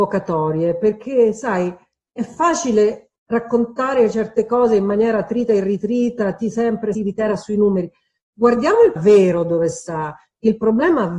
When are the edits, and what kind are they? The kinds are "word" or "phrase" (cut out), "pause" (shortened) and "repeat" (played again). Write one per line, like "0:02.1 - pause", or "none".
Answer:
0:03.2 - pause
0:06.9 - word
0:09.0 - word